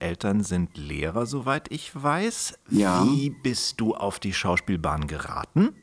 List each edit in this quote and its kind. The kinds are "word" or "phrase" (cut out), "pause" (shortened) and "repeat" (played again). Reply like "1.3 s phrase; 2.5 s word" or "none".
none